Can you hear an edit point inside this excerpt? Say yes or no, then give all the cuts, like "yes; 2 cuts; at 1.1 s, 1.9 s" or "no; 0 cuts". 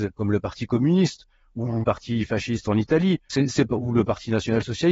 yes; 2 cuts; at 1.8 s, 3.3 s